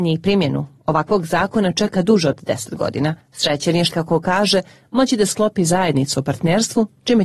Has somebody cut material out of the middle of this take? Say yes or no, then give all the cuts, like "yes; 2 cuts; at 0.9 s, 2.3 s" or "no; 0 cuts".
yes; 1 cut; at 3.9 s